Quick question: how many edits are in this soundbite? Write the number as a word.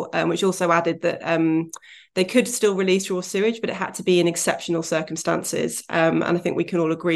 zero